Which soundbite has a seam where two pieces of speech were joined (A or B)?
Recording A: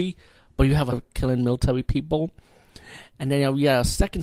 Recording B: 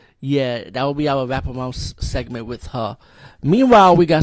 A